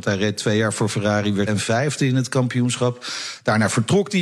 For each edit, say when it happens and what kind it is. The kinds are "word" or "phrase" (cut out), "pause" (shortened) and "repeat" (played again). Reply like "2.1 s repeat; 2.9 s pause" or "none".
1.5 s word